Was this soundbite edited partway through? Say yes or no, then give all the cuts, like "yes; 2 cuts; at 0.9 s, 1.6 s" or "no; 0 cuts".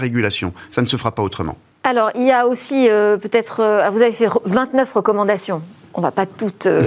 no; 0 cuts